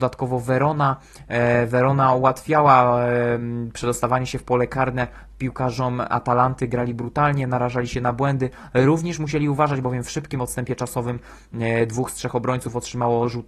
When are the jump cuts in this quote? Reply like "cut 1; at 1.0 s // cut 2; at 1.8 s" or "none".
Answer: none

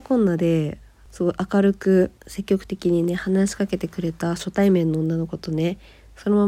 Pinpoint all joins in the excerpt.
cut 1; at 2.2 s

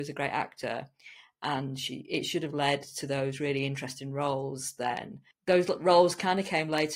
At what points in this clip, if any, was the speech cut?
cut 1; at 5.3 s

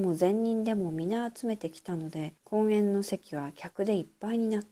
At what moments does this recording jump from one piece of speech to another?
cut 1; at 2.4 s

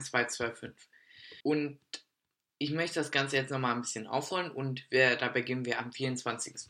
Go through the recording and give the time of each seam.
cut 1; at 1.4 s

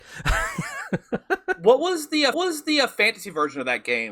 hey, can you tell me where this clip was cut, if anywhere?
cut 1; at 2.3 s

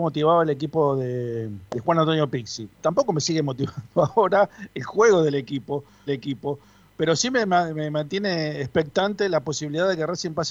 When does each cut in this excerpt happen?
cut 1; at 1.7 s // cut 2; at 2.7 s // cut 3; at 6.1 s

